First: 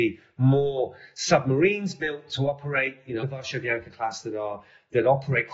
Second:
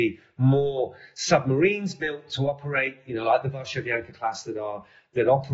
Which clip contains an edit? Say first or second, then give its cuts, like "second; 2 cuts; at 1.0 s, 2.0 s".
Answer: first; 1 cut; at 3.2 s